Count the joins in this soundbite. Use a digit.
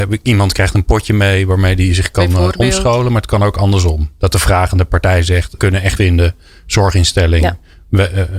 2